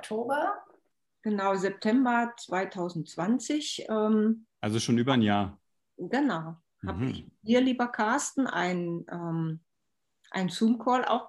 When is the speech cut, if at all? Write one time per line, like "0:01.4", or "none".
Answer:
none